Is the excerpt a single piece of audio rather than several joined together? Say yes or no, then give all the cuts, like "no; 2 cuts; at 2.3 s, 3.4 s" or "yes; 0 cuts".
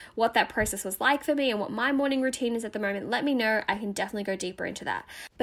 yes; 0 cuts